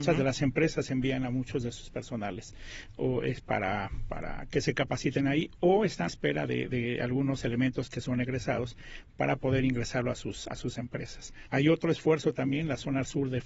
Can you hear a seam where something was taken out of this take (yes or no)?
yes